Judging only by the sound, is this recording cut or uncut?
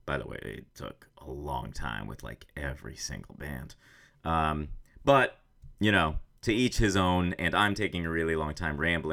uncut